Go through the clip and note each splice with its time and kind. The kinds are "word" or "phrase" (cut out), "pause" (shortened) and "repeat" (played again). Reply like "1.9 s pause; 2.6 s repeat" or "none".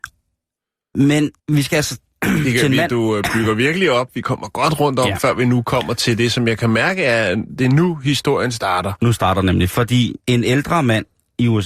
1.4 s pause; 10.2 s pause